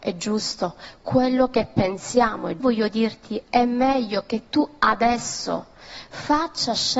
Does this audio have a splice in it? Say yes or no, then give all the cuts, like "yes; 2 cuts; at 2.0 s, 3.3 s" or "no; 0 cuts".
yes; 1 cut; at 2.6 s